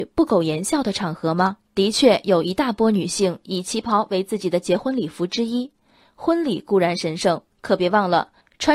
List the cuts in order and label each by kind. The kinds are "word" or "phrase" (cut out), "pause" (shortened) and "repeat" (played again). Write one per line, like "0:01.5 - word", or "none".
0:01.6 - pause
0:07.5 - pause